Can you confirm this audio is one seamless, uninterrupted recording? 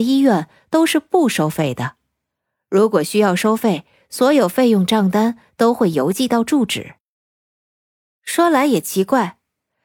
yes; 0 cuts

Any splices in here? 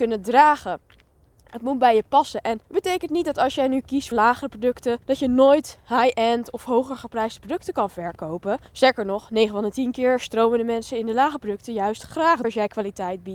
yes; 5 cuts; at 2.6 s, 4.1 s, 5.0 s, 8.7 s, 12.4 s

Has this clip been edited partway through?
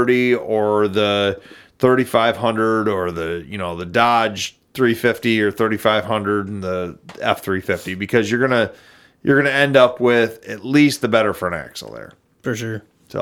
no; 0 cuts

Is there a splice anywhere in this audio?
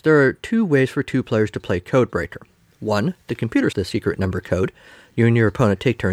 yes; 1 cut; at 3.7 s

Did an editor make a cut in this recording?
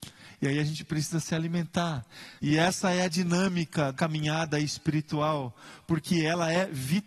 yes; 2 cuts; at 2.4 s, 3.9 s

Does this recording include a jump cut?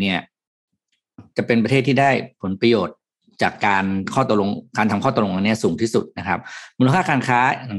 no; 0 cuts

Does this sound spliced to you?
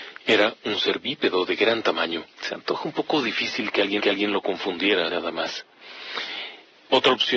yes; 3 cuts; at 2.3 s, 4.0 s, 5.1 s

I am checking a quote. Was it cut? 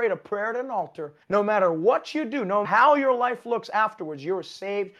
yes; 2 cuts; at 1.2 s, 2.6 s

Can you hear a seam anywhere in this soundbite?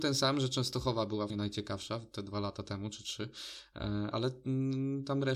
yes; 2 cuts; at 1.3 s, 4.1 s

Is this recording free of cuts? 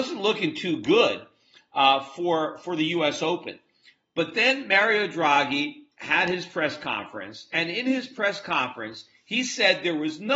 yes; 0 cuts

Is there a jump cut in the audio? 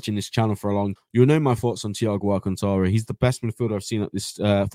yes; 1 cut; at 1.0 s

